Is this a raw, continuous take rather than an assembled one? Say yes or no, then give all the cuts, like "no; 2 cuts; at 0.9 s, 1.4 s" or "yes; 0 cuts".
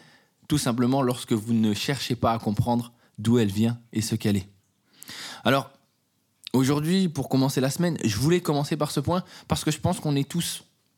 yes; 0 cuts